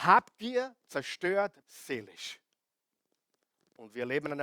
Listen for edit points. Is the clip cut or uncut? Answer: cut